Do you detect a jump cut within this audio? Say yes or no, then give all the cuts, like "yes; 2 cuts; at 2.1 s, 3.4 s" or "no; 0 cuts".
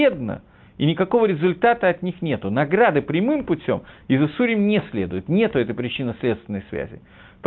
no; 0 cuts